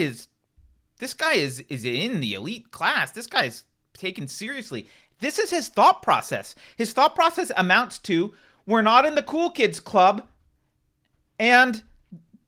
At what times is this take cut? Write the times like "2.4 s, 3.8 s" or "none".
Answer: none